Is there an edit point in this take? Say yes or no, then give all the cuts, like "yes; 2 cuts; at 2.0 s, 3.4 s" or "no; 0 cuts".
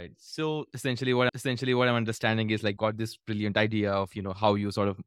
yes; 2 cuts; at 1.3 s, 2.8 s